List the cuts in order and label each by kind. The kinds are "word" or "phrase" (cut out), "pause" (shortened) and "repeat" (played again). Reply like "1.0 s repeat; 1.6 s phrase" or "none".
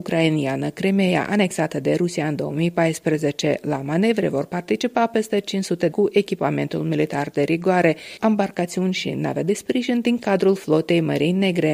5.9 s phrase; 8.2 s word